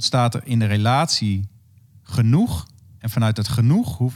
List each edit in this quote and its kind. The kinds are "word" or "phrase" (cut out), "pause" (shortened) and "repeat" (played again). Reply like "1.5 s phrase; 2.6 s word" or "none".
none